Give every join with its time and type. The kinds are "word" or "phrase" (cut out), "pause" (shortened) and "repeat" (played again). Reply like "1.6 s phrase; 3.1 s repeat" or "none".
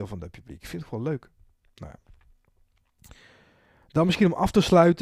none